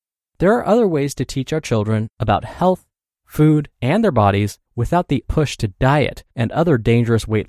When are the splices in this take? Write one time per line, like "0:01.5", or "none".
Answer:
0:03.7
0:04.7
0:05.2
0:06.3

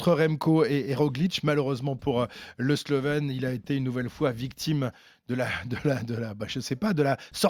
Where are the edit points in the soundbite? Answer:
none

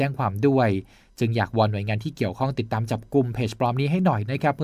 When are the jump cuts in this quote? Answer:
none

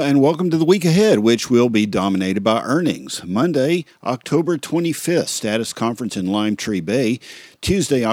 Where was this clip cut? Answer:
none

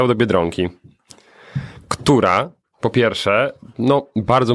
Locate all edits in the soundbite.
none

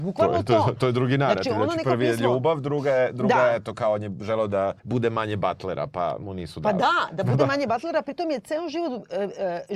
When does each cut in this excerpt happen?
0:04.8

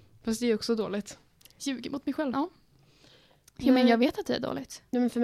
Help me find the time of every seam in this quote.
0:02.3

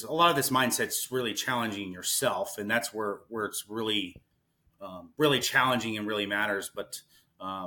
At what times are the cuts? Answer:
none

